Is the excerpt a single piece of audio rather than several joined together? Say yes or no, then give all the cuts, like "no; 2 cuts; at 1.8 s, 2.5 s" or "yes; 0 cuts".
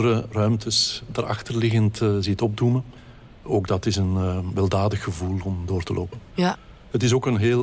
yes; 0 cuts